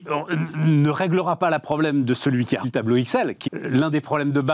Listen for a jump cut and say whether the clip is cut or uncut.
cut